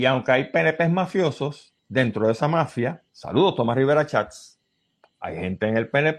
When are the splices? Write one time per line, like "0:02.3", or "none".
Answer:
0:01.8
0:03.1
0:05.0